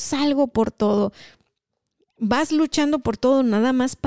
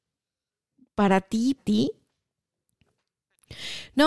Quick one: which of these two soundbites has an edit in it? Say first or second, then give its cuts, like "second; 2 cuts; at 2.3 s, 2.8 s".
second; 1 cut; at 1.6 s